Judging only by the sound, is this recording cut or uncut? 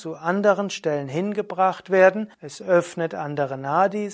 cut